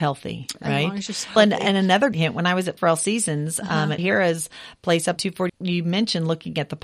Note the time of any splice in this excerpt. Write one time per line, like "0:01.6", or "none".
0:01.4
0:02.1
0:02.8
0:04.0
0:05.2
0:05.5

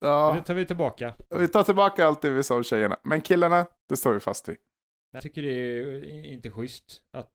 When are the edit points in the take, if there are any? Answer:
0:01.3
0:03.8
0:05.2

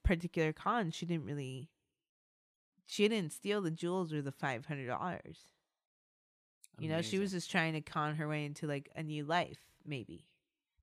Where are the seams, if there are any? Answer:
none

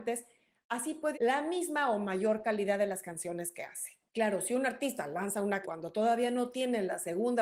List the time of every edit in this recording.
0:01.1
0:04.1
0:05.6

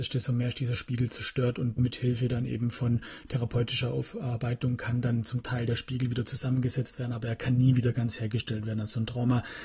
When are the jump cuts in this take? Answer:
0:01.8

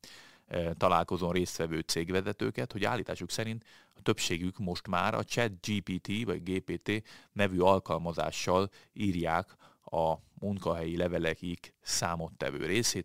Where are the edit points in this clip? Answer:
none

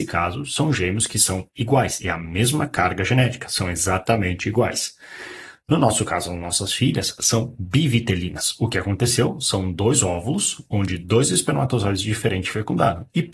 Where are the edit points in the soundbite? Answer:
none

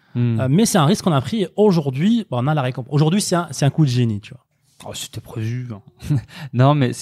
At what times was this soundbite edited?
none

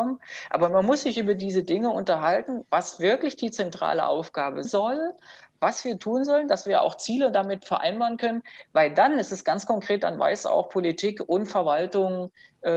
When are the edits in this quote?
0:04.6

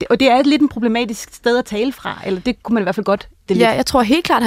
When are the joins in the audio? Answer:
0:03.5

